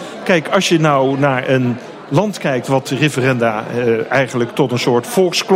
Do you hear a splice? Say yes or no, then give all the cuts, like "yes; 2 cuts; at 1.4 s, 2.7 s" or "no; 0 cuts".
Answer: no; 0 cuts